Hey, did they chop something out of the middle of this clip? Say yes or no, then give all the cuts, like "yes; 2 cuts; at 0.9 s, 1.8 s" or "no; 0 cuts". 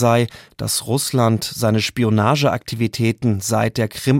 no; 0 cuts